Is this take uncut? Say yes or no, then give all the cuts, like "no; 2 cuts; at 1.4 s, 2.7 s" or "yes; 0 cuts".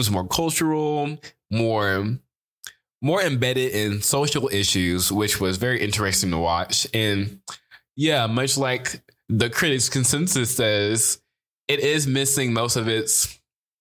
yes; 0 cuts